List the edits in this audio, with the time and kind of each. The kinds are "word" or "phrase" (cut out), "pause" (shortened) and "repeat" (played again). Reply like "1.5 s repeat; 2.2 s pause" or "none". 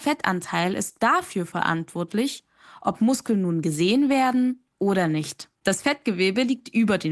1.0 s word; 5.6 s pause